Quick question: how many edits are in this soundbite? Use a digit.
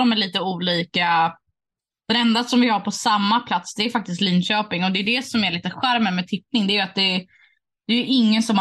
0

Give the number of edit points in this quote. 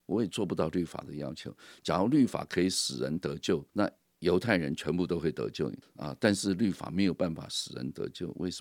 2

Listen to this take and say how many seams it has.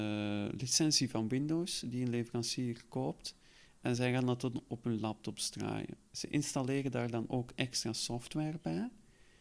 0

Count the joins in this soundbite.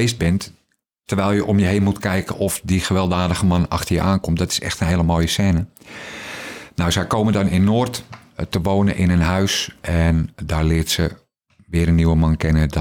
0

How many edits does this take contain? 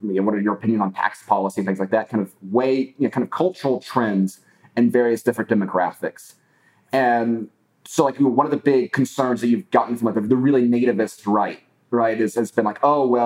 0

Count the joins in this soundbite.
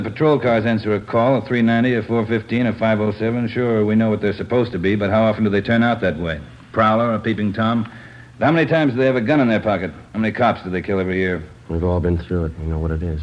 2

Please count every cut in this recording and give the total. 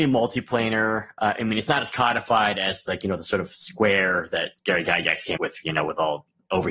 2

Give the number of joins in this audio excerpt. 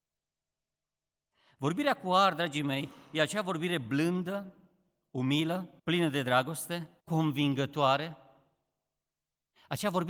2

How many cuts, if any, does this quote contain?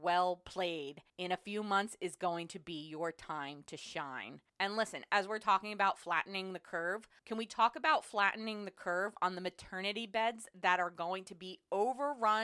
3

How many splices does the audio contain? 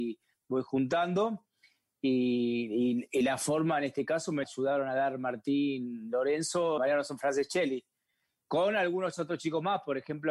2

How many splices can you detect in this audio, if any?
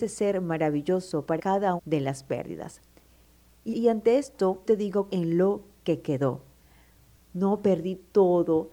5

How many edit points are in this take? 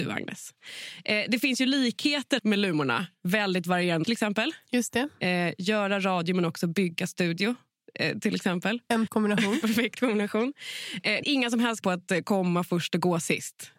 6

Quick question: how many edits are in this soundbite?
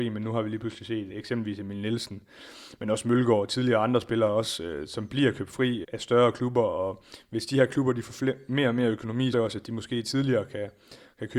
3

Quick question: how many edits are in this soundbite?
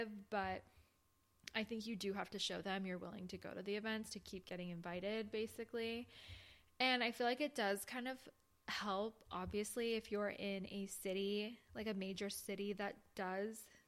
0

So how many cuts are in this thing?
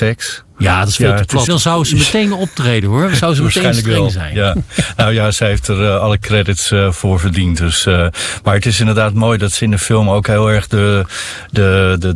1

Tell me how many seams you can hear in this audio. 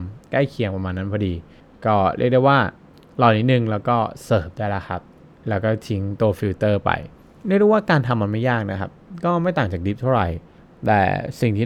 0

